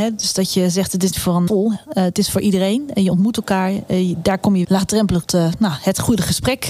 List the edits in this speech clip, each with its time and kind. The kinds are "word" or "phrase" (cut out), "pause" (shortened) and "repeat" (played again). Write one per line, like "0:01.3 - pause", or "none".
0:01.1 - word
0:01.5 - word
0:04.6 - word
0:05.3 - word